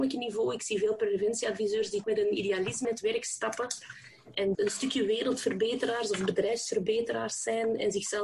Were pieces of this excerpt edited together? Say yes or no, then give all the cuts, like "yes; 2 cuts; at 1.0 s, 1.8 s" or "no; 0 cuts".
yes; 3 cuts; at 2.0 s, 2.8 s, 4.5 s